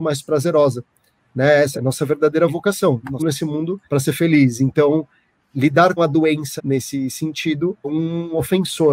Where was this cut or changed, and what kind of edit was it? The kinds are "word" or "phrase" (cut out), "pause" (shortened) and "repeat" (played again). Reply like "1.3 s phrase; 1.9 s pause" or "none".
1.7 s phrase; 3.2 s word; 3.8 s pause; 5.4 s word; 6.0 s word; 6.6 s word; 7.8 s phrase